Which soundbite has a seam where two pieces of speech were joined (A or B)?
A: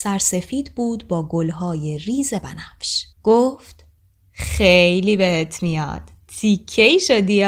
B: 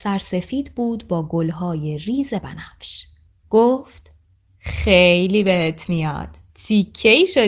A